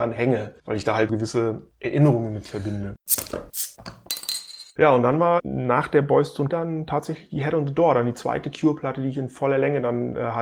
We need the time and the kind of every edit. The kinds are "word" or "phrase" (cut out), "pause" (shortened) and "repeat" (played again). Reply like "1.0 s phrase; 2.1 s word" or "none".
1.1 s word; 4.7 s pause; 5.4 s word; 6.5 s word

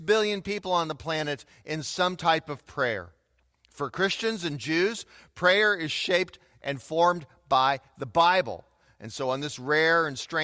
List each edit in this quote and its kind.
none

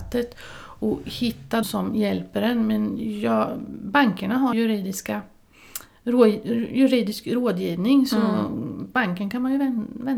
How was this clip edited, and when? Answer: 1.6 s word; 4.5 s word

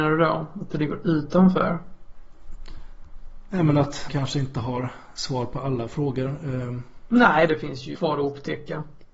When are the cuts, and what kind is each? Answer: 4.1 s word; 7.5 s word; 8.0 s word

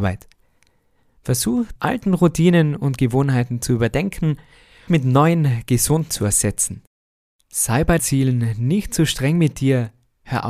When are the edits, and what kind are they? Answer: 1.8 s word; 4.9 s word; 6.1 s word; 8.0 s word

